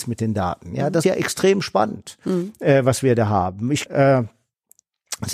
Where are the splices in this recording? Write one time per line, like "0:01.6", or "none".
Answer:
0:01.0
0:03.9

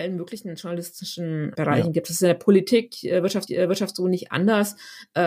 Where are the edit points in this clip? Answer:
0:01.5
0:03.5

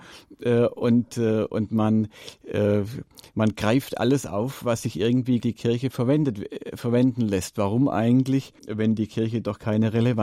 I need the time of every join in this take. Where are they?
0:05.4
0:08.6

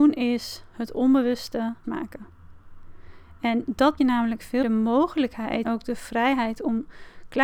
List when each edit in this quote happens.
0:01.8
0:04.0
0:04.6
0:05.6

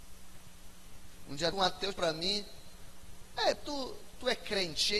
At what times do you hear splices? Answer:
0:01.5
0:01.9
0:03.5

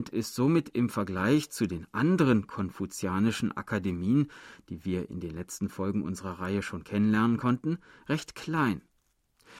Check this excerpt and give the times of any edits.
none

